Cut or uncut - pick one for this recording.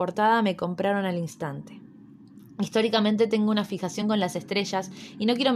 uncut